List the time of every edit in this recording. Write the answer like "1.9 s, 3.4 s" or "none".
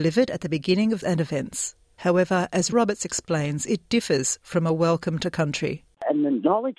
1.0 s, 2.7 s